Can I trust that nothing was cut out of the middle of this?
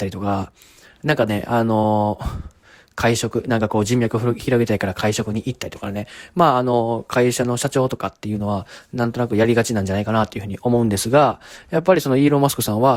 yes; 0 cuts

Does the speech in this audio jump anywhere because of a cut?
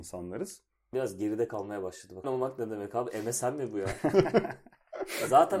yes; 2 cuts; at 0.9 s, 2.2 s

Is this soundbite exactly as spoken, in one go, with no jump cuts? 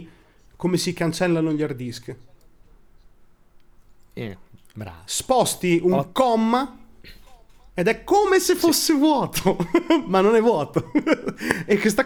yes; 0 cuts

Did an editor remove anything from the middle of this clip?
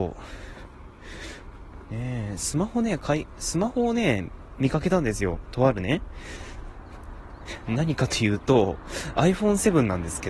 no; 0 cuts

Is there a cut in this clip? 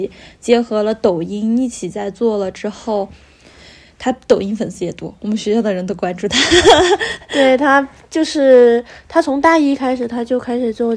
no; 0 cuts

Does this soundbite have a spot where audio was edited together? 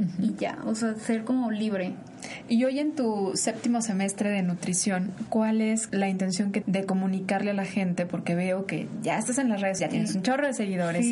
yes; 3 cuts; at 5.9 s, 6.6 s, 9.8 s

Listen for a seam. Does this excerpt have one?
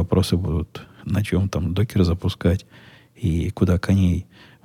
no; 0 cuts

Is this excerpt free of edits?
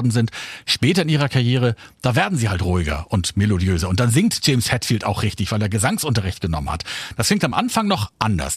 yes; 0 cuts

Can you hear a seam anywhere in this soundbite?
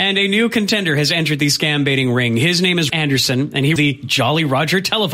yes; 2 cuts; at 2.9 s, 3.8 s

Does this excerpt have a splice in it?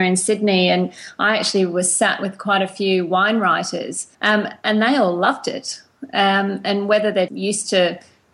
yes; 2 cuts; at 4.1 s, 7.3 s

